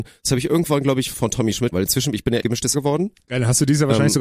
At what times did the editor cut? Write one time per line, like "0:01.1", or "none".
0:01.1
0:01.7
0:02.4
0:02.7

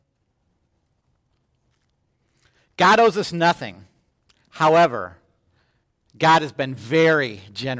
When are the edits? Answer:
none

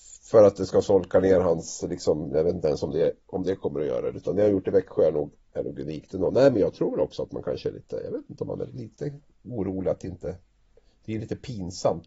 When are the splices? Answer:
0:08.7

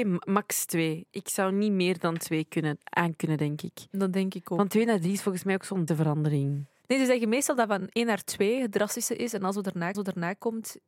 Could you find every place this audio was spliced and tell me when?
0:05.9
0:09.9

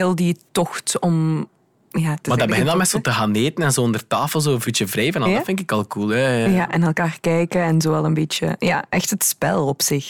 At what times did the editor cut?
none

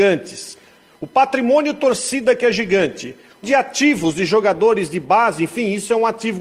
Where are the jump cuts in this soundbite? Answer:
0:03.4

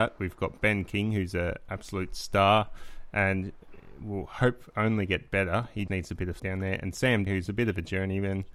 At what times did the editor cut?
0:05.9
0:06.4
0:07.3

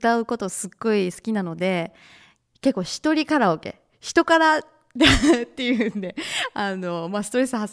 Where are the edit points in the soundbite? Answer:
none

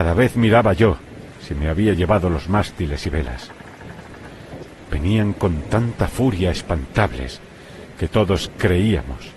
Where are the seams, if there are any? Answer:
none

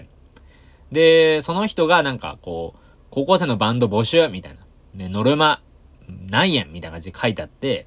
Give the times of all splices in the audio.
none

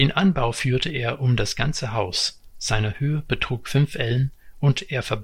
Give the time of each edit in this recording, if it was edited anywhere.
none

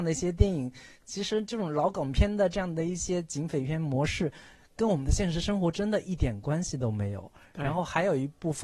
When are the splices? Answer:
none

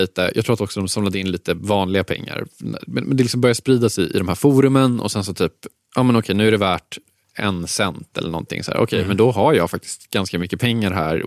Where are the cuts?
none

